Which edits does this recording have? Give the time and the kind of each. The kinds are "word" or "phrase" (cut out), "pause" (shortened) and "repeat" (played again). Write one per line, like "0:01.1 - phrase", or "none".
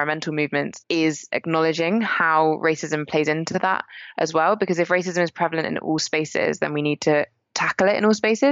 none